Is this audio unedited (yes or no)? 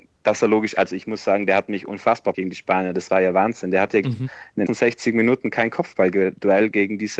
no